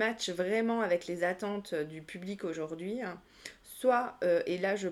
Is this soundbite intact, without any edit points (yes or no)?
yes